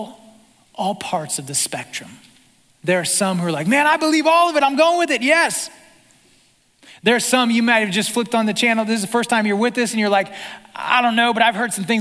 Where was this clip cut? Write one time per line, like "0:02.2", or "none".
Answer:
none